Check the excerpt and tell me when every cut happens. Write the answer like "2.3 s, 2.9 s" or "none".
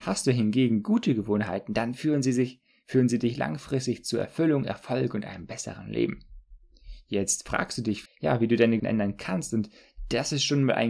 8.1 s, 8.8 s